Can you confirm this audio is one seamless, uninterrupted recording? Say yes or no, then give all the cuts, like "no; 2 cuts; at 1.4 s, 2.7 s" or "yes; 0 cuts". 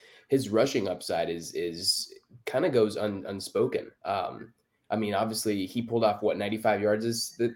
yes; 0 cuts